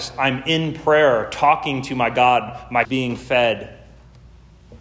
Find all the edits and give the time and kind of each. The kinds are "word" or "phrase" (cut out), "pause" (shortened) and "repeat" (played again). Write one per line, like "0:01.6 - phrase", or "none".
0:02.8 - phrase